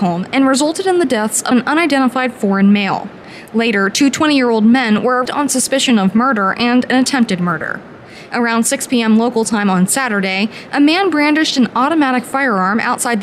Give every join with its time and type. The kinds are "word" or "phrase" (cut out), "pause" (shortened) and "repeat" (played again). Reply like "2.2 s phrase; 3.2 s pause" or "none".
1.5 s phrase; 5.3 s word

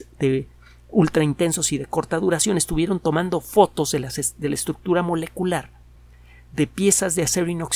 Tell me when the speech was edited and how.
none

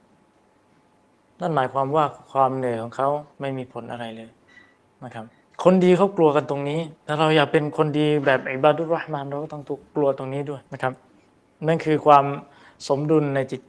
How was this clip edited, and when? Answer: 3.3 s pause; 4.8 s pause; 5.4 s pause; 7.0 s pause; 10.7 s pause

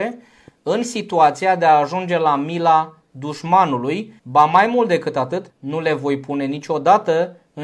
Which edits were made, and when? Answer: 4.2 s pause; 5.5 s pause

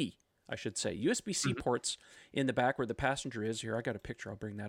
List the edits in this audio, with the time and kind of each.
none

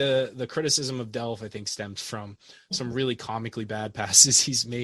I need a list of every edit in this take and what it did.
none

